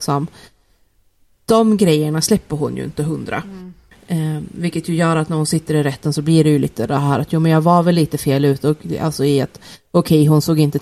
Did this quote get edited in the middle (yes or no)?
no